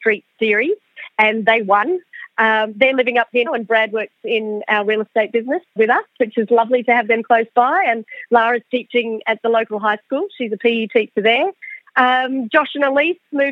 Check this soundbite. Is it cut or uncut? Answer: cut